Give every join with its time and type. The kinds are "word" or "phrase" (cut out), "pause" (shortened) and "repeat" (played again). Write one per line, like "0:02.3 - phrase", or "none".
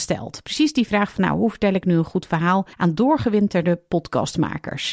0:02.7 - pause